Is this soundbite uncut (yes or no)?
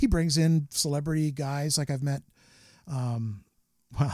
yes